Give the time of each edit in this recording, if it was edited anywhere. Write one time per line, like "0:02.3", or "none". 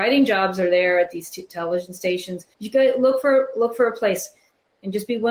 0:02.5